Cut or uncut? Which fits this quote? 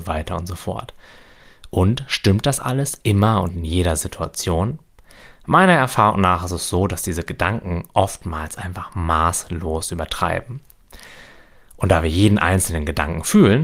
uncut